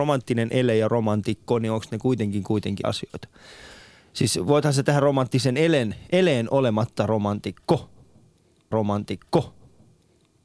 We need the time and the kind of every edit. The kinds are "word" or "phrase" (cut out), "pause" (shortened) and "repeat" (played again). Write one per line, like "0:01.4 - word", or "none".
0:02.8 - word
0:08.7 - repeat